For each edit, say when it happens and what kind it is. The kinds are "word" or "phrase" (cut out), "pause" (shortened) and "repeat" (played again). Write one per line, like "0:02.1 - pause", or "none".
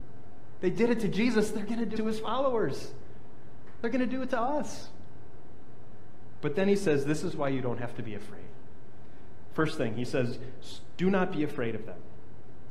0:02.0 - word

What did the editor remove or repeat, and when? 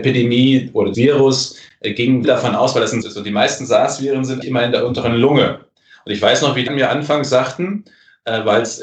0:00.9 - word
0:02.2 - word
0:03.0 - word
0:04.4 - word
0:06.7 - word

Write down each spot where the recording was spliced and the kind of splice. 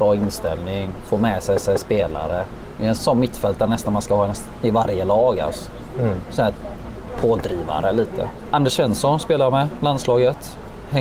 0:01.6 - repeat
0:03.0 - word

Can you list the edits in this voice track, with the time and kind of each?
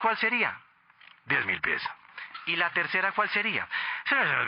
none

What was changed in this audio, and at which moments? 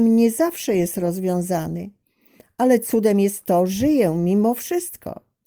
0:03.7 - word

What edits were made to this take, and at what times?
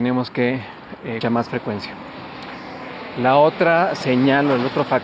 0:01.2 - phrase

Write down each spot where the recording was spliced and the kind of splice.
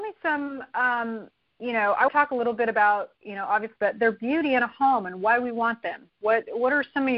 0:02.1 - word
0:03.8 - word

